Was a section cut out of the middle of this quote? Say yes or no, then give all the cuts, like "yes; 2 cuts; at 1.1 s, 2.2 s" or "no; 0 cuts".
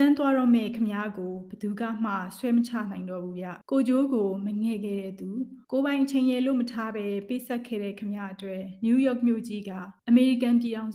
yes; 3 cuts; at 3.6 s, 5.6 s, 10.0 s